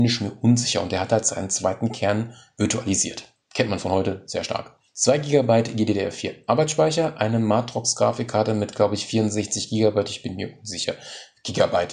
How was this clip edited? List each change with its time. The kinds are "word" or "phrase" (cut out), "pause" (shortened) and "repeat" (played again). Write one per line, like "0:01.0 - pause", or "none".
0:03.4 - pause
0:04.9 - pause